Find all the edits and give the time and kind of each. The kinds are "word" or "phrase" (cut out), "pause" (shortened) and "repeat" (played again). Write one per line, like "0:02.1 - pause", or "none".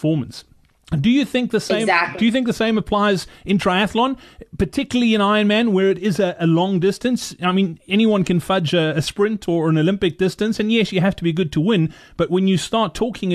none